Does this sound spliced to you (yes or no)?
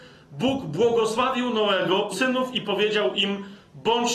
yes